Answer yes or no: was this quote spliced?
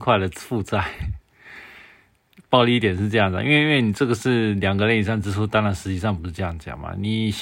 no